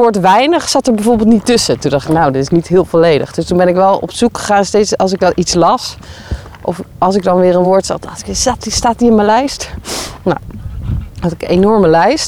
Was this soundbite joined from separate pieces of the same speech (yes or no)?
no